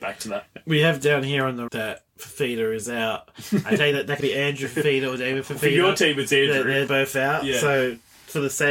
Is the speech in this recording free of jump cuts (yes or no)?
no